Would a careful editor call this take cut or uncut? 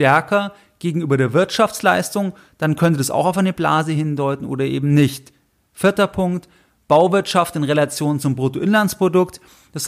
uncut